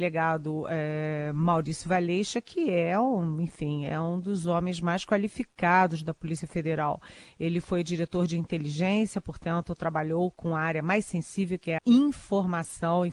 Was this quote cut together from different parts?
yes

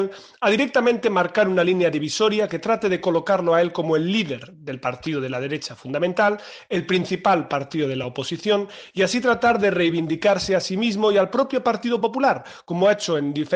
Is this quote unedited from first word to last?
yes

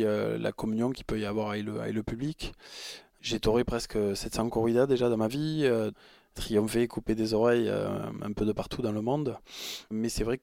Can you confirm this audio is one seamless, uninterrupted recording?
yes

